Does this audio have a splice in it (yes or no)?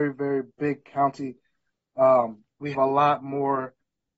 yes